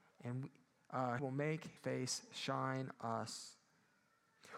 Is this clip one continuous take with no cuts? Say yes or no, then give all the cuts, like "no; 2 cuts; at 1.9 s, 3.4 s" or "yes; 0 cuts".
no; 3 cuts; at 1.2 s, 1.8 s, 2.9 s